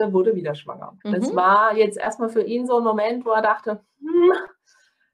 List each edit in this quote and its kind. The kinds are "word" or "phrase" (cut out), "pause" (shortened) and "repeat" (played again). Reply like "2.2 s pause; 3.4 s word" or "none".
1.0 s pause